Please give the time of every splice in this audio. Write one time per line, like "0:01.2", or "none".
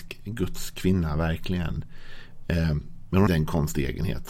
0:03.3